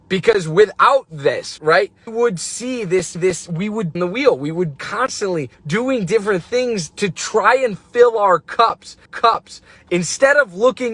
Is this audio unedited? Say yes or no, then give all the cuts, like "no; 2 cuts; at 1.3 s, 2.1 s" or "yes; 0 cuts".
no; 8 cuts; at 1.6 s, 2.1 s, 3.2 s, 4.0 s, 4.8 s, 5.5 s, 6.9 s, 9.1 s